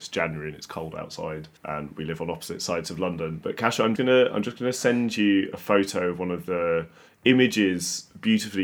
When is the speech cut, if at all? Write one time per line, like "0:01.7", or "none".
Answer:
0:01.6
0:04.0